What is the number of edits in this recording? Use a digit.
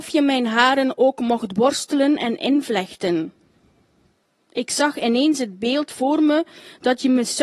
0